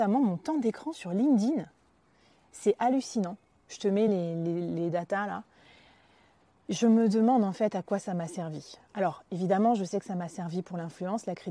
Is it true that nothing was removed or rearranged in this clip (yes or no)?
yes